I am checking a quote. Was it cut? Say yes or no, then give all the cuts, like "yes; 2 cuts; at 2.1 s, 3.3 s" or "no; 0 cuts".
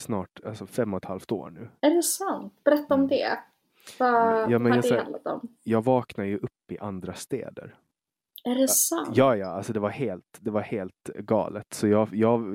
no; 0 cuts